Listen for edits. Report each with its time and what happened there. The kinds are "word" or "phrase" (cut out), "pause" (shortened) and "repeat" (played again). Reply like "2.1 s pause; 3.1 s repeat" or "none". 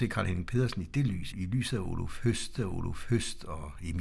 1.3 s word; 2.6 s repeat